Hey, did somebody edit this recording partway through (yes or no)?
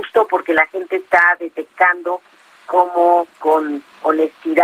no